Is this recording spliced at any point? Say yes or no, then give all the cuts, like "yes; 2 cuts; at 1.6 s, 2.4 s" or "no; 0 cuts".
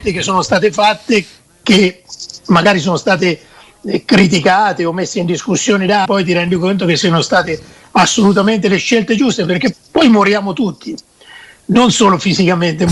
yes; 2 cuts; at 6.0 s, 9.7 s